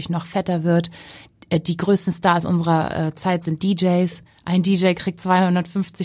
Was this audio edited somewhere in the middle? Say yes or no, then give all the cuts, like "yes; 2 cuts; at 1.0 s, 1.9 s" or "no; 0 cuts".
yes; 1 cut; at 4.3 s